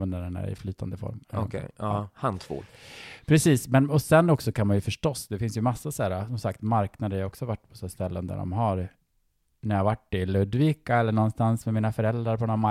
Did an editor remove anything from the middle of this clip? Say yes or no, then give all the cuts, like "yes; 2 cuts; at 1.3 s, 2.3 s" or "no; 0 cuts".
no; 0 cuts